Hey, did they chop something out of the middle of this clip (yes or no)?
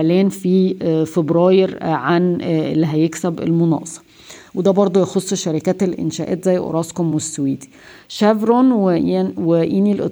no